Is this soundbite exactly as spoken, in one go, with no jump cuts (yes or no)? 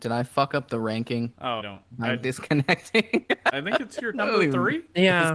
no